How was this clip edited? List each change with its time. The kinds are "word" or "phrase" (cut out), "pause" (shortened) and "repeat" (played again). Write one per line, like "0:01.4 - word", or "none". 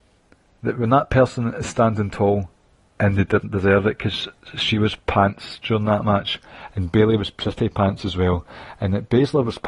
none

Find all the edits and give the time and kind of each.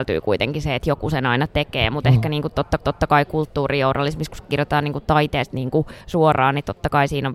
0:02.8 - repeat
0:05.5 - phrase
0:06.0 - pause

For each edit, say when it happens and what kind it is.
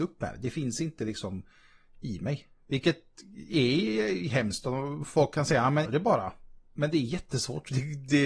0:05.8 - word

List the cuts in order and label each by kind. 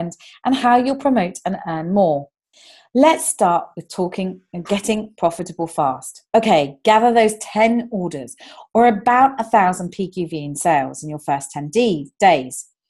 0:02.5 - pause
0:06.3 - pause

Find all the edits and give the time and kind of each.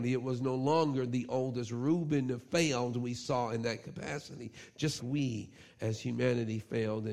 0:05.0 - word

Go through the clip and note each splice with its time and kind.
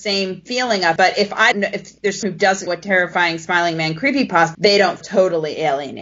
0:01.0 - word
0:01.5 - word
0:02.2 - word
0:02.7 - word
0:04.5 - word
0:05.0 - word

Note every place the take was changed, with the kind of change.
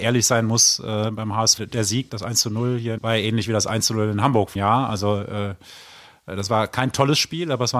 0:01.6 - word
0:02.1 - word
0:03.0 - word
0:04.6 - word

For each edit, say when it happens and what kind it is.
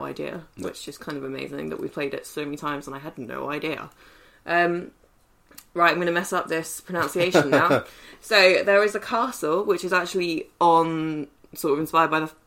none

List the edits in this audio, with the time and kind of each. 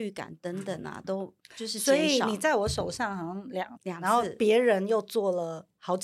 0:03.8 - phrase

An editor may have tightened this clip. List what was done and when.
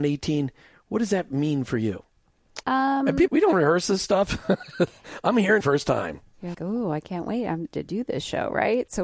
0:02.6 - pause
0:03.3 - phrase
0:05.6 - phrase
0:06.5 - word
0:07.7 - phrase

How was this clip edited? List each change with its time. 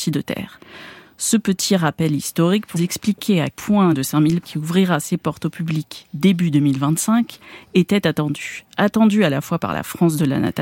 0:02.8 - word
0:03.5 - word
0:03.9 - word
0:04.4 - word

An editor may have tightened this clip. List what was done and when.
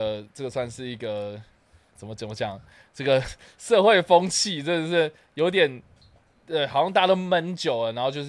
0:02.0 - word

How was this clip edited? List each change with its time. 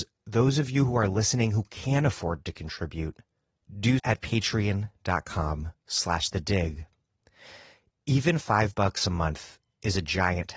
0:04.0 - word

